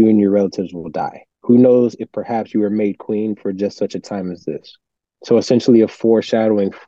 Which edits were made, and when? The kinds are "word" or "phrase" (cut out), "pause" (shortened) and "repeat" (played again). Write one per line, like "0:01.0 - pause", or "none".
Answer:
0:01.3 - pause
0:05.0 - pause